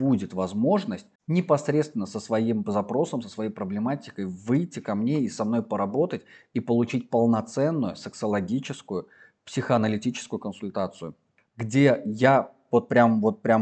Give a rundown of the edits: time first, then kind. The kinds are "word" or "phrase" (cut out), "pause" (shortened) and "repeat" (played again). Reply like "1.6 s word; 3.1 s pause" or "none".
1.2 s pause